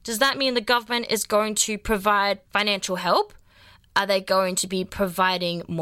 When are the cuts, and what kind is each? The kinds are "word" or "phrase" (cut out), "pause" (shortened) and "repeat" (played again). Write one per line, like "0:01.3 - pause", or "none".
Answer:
0:02.4 - word